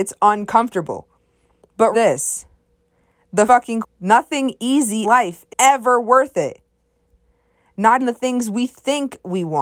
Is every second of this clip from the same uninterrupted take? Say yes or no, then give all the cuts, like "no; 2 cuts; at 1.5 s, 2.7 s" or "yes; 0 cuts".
no; 6 cuts; at 1.9 s, 3.5 s, 3.8 s, 5.0 s, 5.5 s, 8.0 s